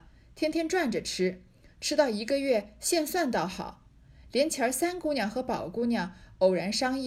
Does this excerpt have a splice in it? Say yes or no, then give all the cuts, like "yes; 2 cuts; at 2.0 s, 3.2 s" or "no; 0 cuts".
no; 0 cuts